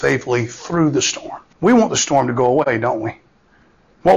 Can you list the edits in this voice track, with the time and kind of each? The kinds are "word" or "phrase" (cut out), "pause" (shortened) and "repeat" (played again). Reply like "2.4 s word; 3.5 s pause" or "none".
1.5 s pause